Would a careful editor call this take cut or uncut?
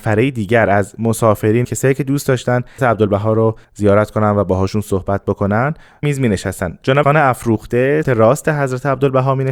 cut